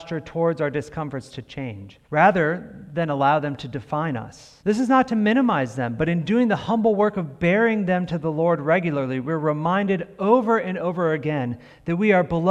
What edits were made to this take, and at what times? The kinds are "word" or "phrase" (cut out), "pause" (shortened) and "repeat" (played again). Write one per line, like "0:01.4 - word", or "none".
0:02.0 - pause
0:04.6 - pause